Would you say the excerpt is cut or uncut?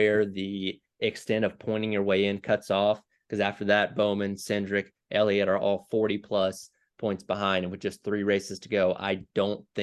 uncut